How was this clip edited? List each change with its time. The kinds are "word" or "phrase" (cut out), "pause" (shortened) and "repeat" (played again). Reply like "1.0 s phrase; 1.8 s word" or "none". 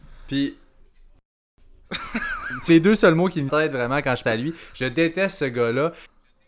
2.7 s word; 3.5 s phrase; 4.2 s word